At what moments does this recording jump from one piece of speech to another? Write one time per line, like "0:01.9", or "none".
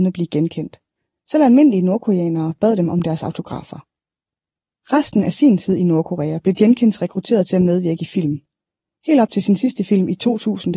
none

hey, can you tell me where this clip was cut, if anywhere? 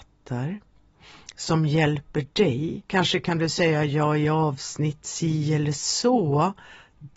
0:02.9

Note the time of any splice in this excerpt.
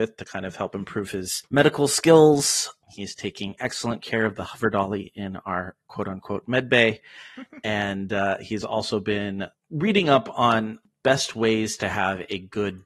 none

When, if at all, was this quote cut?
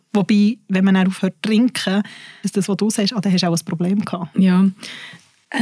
0:02.4

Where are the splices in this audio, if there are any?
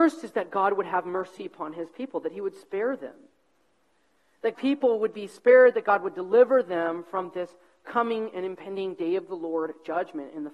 0:04.5

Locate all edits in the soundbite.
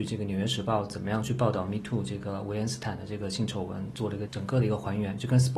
none

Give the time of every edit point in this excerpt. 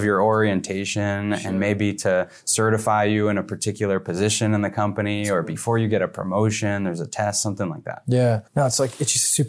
0:08.5

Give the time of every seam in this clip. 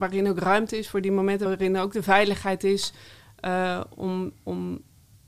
0:01.5

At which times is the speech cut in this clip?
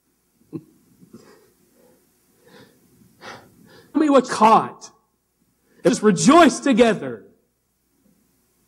0:03.9
0:04.3
0:05.9

